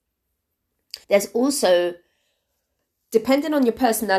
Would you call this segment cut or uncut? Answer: cut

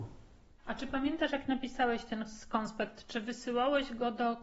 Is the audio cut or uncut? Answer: uncut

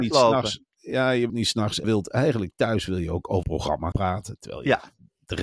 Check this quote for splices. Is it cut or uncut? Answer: cut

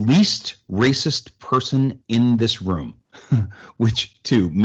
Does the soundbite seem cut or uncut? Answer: cut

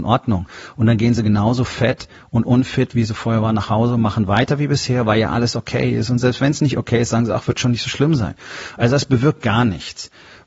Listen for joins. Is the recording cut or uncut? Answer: uncut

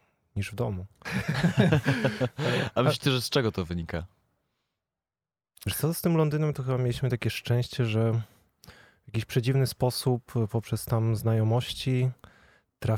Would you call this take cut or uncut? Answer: uncut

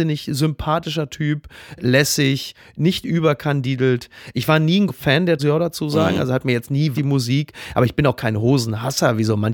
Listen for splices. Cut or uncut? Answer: cut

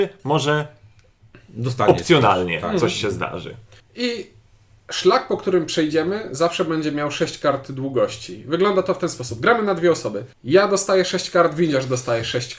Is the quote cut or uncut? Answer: cut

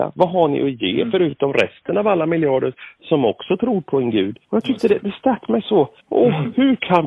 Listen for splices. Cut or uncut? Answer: cut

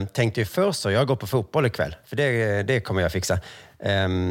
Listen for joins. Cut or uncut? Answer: uncut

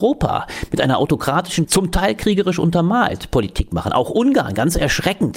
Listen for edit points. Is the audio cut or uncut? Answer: cut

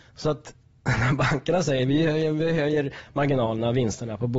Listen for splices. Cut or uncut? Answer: uncut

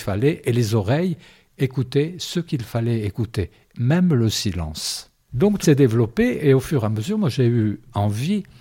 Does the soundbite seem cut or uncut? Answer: cut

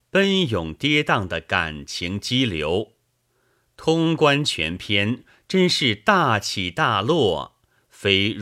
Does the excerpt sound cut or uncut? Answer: uncut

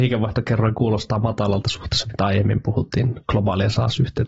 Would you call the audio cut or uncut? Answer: uncut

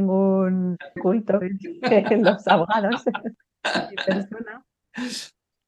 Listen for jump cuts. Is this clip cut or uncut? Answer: cut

